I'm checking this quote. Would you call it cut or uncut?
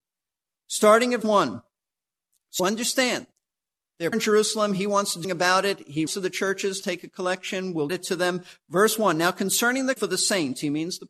cut